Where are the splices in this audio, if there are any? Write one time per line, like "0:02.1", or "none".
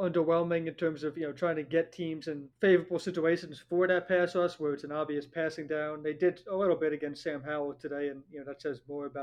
0:02.5